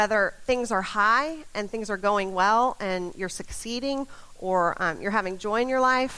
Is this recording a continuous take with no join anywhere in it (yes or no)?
yes